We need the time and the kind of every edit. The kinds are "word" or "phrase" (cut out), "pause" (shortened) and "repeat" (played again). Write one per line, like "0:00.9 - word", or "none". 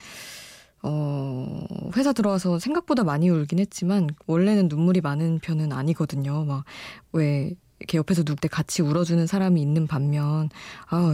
0:08.4 - word